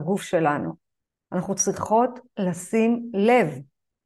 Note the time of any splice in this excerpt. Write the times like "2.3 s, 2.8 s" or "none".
none

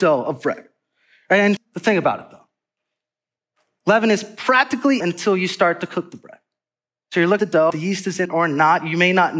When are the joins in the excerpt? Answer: 1.6 s, 5.0 s, 7.4 s, 7.7 s, 8.3 s

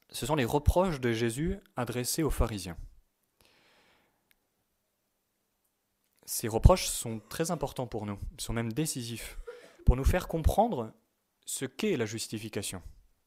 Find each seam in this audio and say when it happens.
none

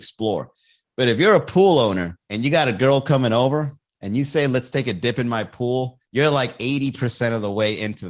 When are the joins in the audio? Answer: 2.2 s, 3.8 s, 6.1 s

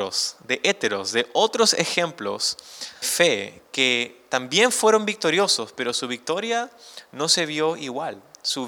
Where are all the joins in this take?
3.0 s

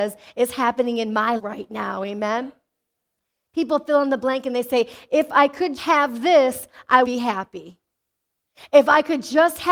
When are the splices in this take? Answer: 1.4 s, 5.8 s, 7.0 s

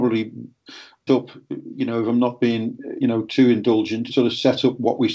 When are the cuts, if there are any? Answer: 1.1 s, 3.0 s, 4.1 s

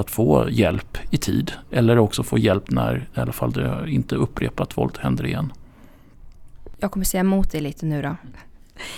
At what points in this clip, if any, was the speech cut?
none

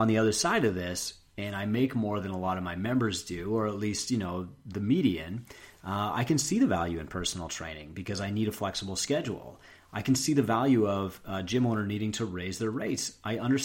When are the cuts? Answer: none

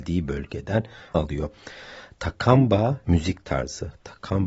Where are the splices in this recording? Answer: 1.1 s, 3.0 s

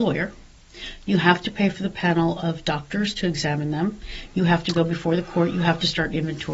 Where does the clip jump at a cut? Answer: none

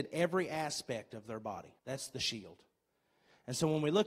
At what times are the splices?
1.8 s

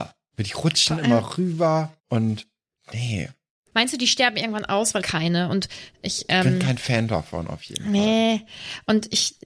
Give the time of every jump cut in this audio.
2.0 s, 5.0 s

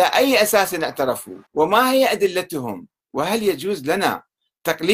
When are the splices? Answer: 1.5 s, 3.0 s

